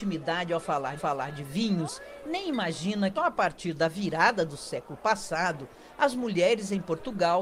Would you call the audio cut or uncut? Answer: cut